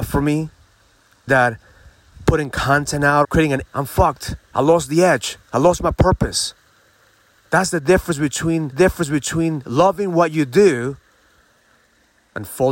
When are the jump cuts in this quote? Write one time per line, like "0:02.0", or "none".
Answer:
0:01.3
0:03.2
0:03.6
0:04.4
0:05.4
0:08.7